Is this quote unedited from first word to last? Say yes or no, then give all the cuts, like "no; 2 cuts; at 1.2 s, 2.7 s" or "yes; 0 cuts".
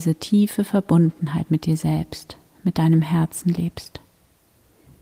yes; 0 cuts